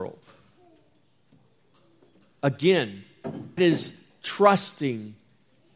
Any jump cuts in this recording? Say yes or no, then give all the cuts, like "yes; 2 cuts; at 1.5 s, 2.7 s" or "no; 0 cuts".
yes; 1 cut; at 3.6 s